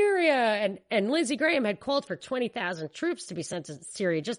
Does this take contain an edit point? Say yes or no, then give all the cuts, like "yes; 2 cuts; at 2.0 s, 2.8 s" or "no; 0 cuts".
no; 0 cuts